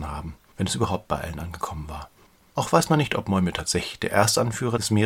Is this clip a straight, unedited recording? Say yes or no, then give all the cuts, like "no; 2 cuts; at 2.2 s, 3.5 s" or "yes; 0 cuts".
yes; 0 cuts